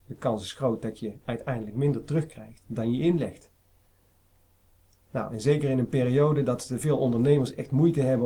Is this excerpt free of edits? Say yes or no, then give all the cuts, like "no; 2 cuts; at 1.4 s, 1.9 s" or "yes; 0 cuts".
yes; 0 cuts